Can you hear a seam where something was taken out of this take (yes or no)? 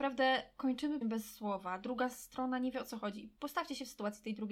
yes